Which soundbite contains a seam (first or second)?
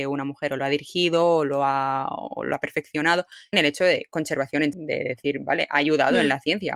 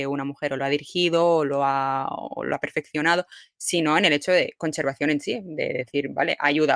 first